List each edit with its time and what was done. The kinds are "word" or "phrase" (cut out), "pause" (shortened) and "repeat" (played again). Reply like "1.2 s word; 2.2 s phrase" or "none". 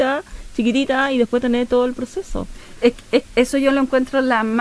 3.2 s word